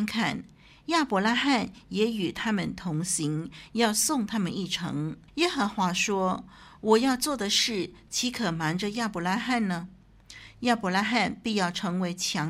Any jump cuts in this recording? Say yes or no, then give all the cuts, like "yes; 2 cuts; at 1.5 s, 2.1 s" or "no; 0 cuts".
yes; 1 cut; at 5.3 s